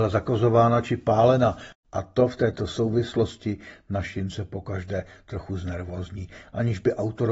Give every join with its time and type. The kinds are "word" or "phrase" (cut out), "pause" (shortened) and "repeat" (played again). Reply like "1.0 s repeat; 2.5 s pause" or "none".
none